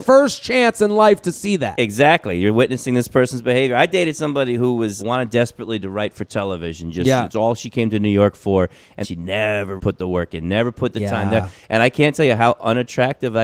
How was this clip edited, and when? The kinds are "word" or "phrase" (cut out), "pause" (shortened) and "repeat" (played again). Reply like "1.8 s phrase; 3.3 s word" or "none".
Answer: 5.0 s word; 9.0 s word; 9.8 s word